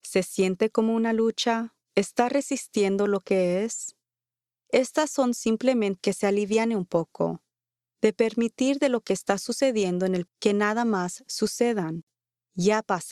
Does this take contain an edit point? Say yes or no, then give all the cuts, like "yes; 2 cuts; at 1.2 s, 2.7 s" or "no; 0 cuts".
yes; 3 cuts; at 1.8 s, 6.0 s, 10.3 s